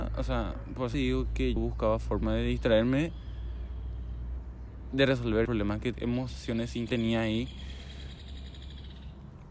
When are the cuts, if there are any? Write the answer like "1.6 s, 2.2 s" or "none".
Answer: 0.9 s, 1.6 s, 5.5 s, 5.9 s, 6.9 s

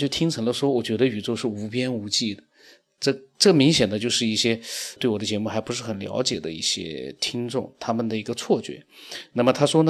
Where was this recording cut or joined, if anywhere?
5.0 s

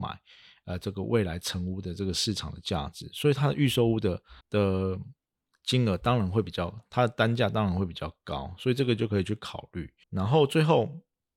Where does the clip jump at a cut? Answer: 4.4 s, 10.0 s

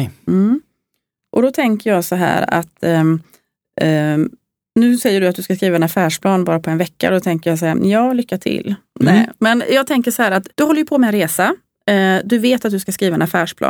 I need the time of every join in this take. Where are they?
4.6 s, 10.5 s

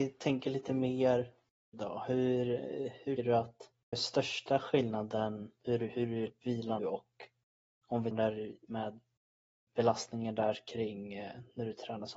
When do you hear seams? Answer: 1.7 s, 3.2 s, 3.9 s, 5.6 s, 6.3 s, 6.8 s, 8.1 s, 8.7 s

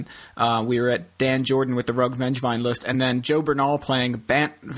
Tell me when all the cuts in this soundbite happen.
none

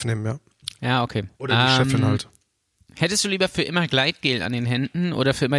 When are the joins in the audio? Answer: 1.3 s

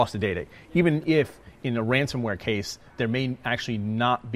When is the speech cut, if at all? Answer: none

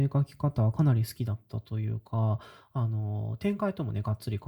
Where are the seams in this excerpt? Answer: none

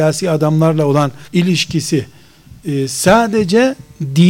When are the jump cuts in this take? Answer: 1.3 s

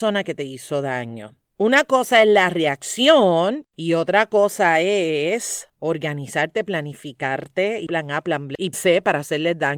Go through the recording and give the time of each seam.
1.4 s, 3.7 s, 5.7 s, 7.9 s, 8.7 s

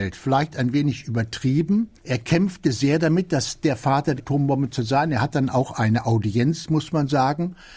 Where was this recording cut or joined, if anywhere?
2.0 s, 4.2 s

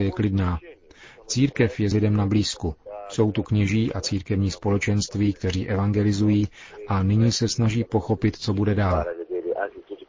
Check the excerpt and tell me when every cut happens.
1.9 s

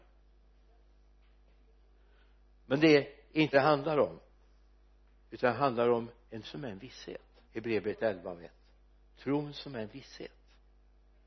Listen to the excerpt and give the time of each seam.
3.5 s, 6.4 s, 7.4 s

